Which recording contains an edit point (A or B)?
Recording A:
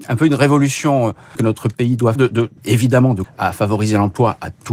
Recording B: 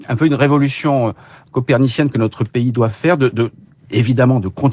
A